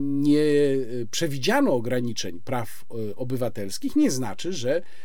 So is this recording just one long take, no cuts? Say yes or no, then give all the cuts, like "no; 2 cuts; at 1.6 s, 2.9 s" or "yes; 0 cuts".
yes; 0 cuts